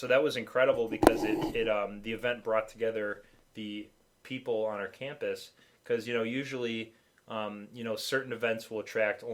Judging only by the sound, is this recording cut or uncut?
uncut